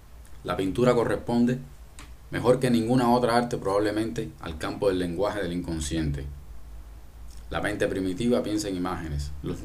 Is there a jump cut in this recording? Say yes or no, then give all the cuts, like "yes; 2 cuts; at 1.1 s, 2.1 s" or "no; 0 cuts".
no; 0 cuts